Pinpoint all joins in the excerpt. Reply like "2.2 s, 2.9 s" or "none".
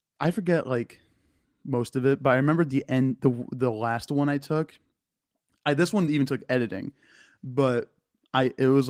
none